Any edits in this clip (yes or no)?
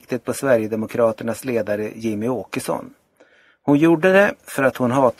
no